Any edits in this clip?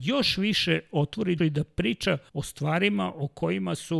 yes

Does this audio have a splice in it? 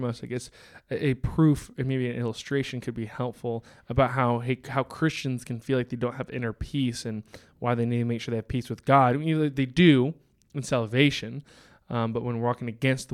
no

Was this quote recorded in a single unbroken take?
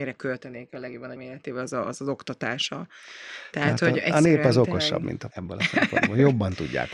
no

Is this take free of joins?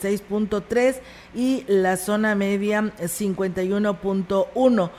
yes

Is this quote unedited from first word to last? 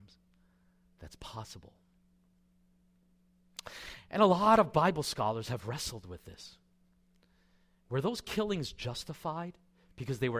yes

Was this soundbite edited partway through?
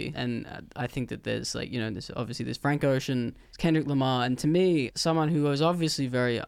no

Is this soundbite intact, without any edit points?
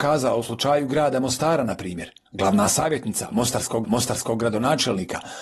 no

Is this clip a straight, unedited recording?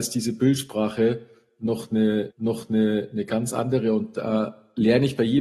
no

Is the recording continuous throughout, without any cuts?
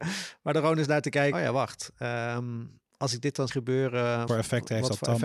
no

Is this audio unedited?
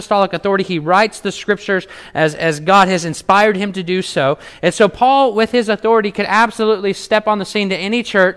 yes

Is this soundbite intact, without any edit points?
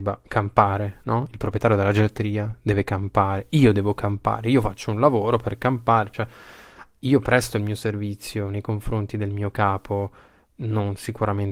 yes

